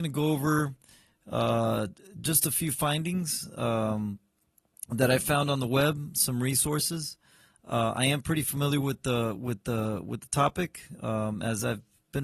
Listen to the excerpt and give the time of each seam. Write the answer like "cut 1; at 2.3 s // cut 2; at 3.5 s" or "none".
none